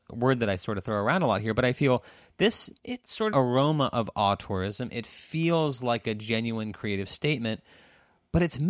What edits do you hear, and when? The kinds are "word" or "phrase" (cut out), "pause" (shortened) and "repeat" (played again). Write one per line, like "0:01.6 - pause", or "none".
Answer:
0:02.8 - pause
0:03.3 - phrase